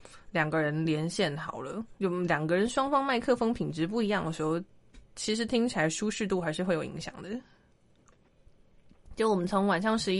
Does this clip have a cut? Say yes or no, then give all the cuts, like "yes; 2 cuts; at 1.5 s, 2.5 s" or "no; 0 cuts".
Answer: yes; 2 cuts; at 2.0 s, 5.0 s